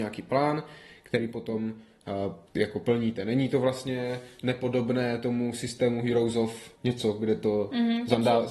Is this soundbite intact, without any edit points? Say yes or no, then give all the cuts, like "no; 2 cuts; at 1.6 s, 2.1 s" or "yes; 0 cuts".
no; 2 cuts; at 2.5 s, 6.8 s